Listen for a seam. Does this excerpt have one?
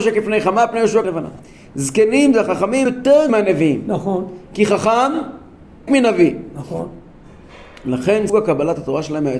yes; 5 cuts; at 1.0 s, 2.9 s, 3.3 s, 5.9 s, 8.3 s

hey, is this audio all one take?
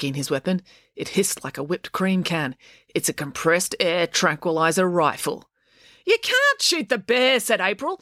yes; 0 cuts

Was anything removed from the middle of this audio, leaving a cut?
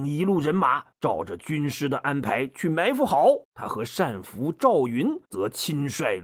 yes; 3 cuts; at 0.9 s, 3.4 s, 5.2 s

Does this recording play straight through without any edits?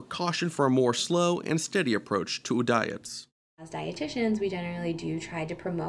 yes; 0 cuts

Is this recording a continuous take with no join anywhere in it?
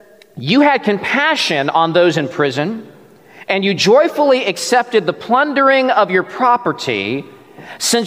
yes; 0 cuts

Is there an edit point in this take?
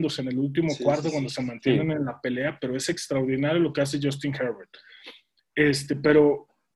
no; 0 cuts

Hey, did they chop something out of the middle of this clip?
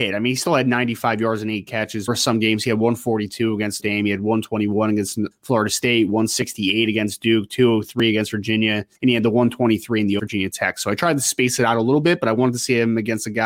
yes; 5 cuts; at 2.1 s, 3.8 s, 5.3 s, 8.9 s, 10.2 s

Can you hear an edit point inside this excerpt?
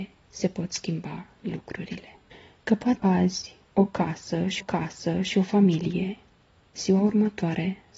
yes; 4 cuts; at 2.3 s, 3.0 s, 4.6 s, 6.8 s

